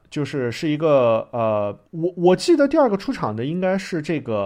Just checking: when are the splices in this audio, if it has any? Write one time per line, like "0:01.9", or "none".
0:01.9